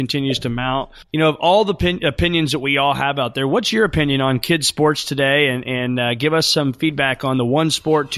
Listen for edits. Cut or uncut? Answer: cut